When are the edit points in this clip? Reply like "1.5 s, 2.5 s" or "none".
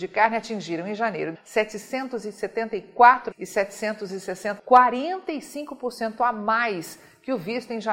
1.3 s, 3.3 s, 4.6 s